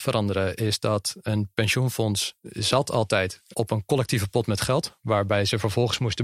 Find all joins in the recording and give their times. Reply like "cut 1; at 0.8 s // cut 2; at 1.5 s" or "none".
cut 1; at 3.5 s